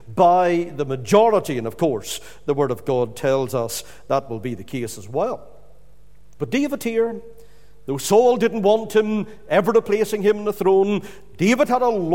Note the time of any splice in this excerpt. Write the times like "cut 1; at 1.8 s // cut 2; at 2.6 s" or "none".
none